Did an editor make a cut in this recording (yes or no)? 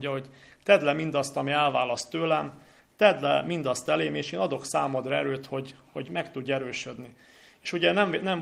no